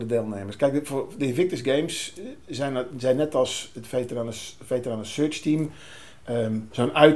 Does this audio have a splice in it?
no; 0 cuts

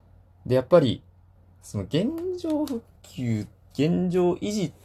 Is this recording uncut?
no; 2 cuts; at 1.3 s, 3.0 s

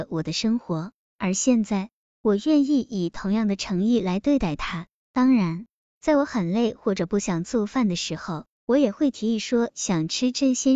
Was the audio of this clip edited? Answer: no; 0 cuts

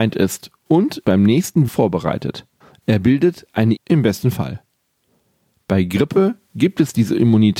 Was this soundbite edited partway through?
yes; 4 cuts; at 1.0 s, 1.7 s, 2.6 s, 3.8 s

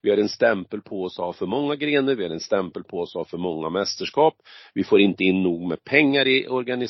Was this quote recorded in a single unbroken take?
yes; 0 cuts

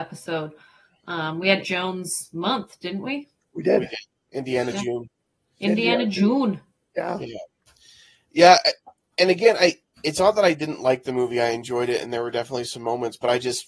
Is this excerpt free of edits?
no; 1 cut; at 1.6 s

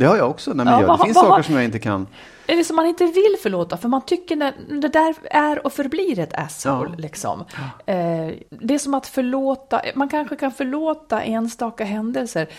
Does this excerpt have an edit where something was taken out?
yes; 1 cut; at 8.5 s

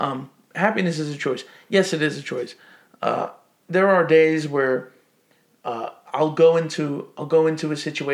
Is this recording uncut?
yes; 0 cuts

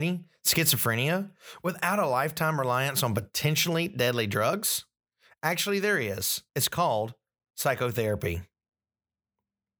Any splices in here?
yes; 1 cut; at 6.5 s

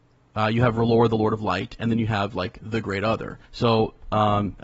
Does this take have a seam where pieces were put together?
yes; 1 cut; at 3.4 s

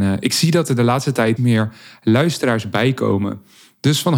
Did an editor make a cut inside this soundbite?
yes; 1 cut; at 1.4 s

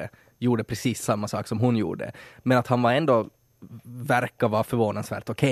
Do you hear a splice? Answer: no; 0 cuts

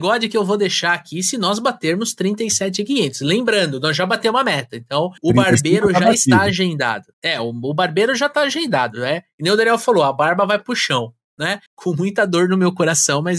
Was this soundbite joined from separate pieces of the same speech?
yes; 3 cuts; at 5.2 s, 7.1 s, 11.7 s

